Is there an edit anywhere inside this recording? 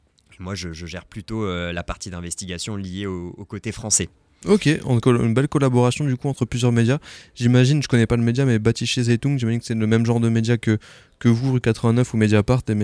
yes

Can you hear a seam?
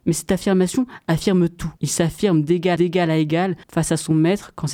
yes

